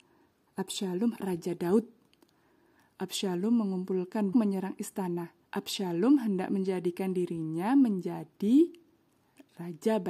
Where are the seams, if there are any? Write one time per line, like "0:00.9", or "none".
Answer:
0:01.2
0:04.3
0:05.5